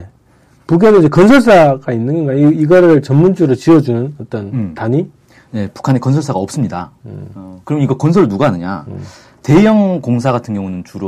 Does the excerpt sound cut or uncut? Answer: uncut